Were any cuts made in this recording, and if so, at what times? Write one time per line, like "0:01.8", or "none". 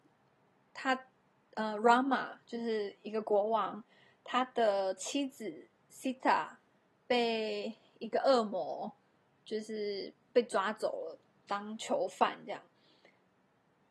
none